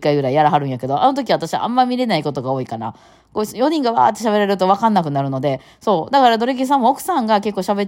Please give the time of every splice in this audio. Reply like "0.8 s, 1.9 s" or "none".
none

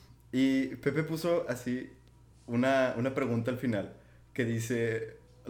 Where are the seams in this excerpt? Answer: none

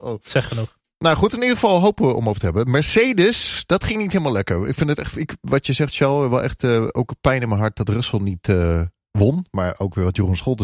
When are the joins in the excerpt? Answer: none

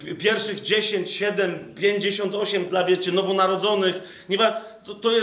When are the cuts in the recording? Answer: 2.7 s

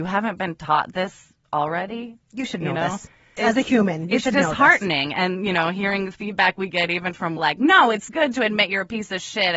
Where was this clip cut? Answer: 2.2 s, 3.4 s, 7.4 s

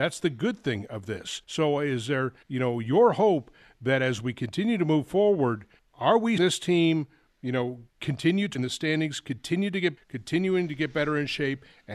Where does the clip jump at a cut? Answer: 1.4 s, 2.4 s, 5.8 s, 6.4 s, 7.3 s, 7.9 s, 8.5 s, 10.0 s

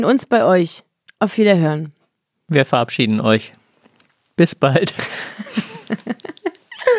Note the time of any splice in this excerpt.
none

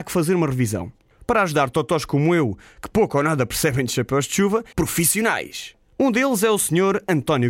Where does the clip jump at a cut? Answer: 4.7 s

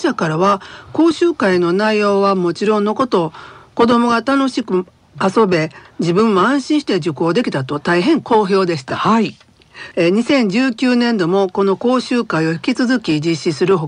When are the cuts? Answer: none

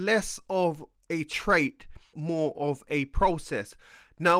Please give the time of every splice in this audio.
2.1 s

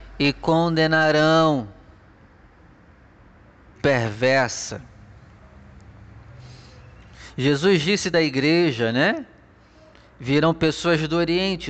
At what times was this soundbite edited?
3.8 s, 8.1 s

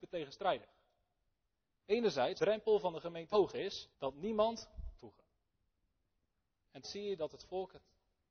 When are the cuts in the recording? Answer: 2.4 s, 3.3 s, 3.9 s, 5.0 s, 6.8 s

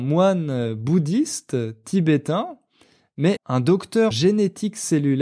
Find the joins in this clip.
3.4 s, 4.1 s

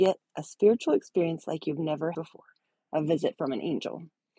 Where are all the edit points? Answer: 2.1 s

